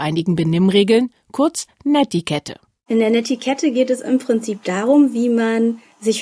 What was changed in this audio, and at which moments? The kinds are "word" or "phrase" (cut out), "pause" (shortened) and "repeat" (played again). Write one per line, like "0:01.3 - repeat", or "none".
none